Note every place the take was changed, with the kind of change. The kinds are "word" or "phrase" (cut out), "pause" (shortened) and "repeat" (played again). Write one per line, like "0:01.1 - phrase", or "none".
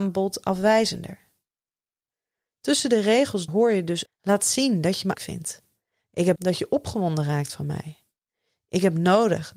0:03.5 - word
0:04.1 - word
0:05.1 - word
0:06.4 - word